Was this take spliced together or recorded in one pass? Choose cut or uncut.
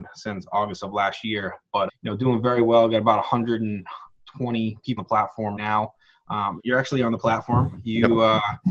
cut